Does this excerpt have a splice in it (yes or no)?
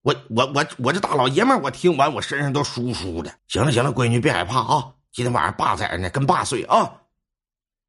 yes